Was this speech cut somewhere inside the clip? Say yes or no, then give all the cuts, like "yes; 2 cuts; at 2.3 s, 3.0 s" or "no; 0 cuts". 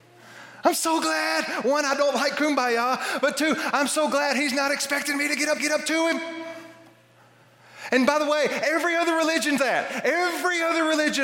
yes; 2 cuts; at 5.6 s, 9.6 s